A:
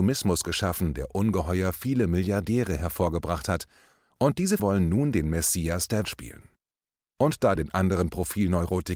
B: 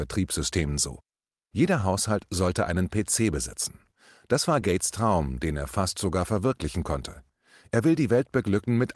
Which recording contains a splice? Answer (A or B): A